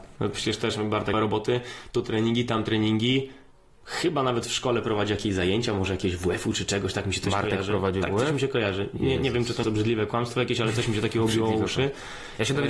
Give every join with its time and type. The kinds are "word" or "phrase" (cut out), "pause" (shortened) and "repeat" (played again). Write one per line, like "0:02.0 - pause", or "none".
0:01.1 - phrase
0:09.6 - word